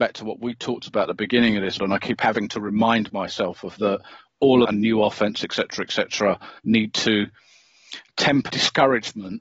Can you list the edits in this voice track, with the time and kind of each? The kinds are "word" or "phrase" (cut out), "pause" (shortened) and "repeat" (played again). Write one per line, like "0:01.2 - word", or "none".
0:01.8 - word
0:03.8 - word
0:04.6 - phrase
0:06.6 - pause
0:08.5 - word